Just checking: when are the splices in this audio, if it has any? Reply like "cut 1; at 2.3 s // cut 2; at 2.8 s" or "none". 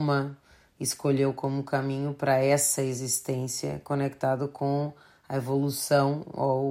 none